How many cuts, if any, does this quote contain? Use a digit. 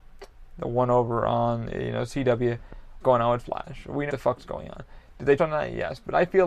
3